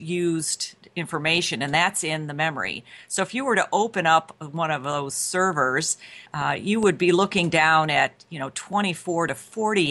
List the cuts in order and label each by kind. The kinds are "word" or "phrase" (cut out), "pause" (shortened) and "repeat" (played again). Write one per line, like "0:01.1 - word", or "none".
0:06.3 - pause